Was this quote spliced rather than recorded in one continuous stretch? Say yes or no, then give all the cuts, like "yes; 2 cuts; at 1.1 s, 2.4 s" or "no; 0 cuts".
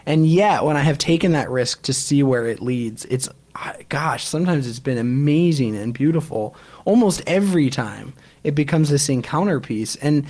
no; 0 cuts